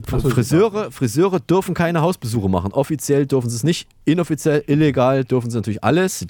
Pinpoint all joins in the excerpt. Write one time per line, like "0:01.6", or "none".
none